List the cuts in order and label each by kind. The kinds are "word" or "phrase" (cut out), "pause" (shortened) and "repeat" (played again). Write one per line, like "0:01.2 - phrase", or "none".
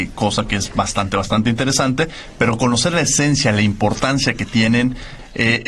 none